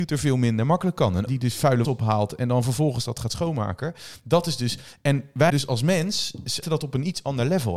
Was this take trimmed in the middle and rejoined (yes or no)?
yes